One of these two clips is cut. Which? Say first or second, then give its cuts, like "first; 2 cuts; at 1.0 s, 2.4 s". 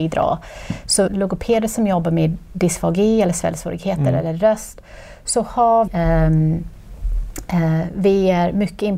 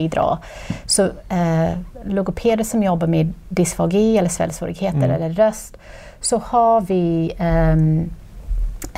first; 2 cuts; at 1.1 s, 5.9 s